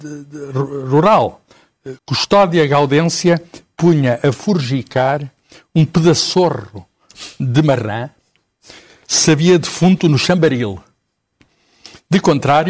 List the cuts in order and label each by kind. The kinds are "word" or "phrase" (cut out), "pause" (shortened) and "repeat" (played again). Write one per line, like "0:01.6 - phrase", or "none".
0:02.0 - pause